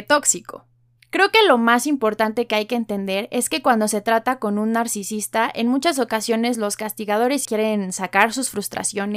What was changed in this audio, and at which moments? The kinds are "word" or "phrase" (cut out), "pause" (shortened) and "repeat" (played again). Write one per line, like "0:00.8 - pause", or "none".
0:01.0 - pause
0:07.4 - word